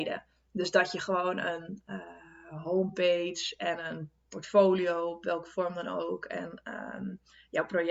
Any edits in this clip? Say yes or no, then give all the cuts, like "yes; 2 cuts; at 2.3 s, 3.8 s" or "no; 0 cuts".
no; 0 cuts